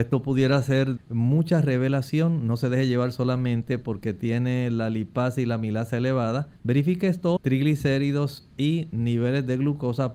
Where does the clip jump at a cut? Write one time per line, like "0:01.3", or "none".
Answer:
0:01.0
0:06.6
0:07.4